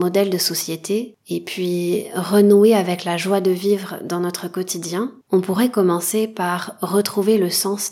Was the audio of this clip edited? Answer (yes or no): yes